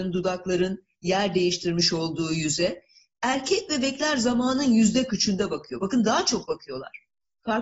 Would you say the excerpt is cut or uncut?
cut